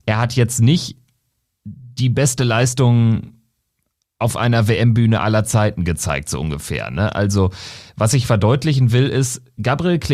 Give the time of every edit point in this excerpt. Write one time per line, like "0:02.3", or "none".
none